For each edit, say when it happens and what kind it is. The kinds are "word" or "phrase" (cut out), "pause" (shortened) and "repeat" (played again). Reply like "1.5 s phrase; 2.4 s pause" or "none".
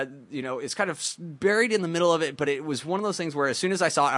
none